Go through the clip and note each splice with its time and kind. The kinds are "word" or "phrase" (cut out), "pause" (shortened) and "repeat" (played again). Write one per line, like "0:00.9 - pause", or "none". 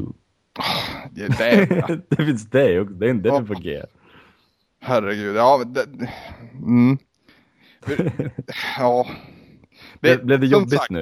none